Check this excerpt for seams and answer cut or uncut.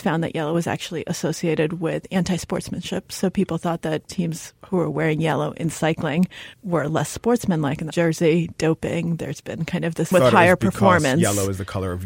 cut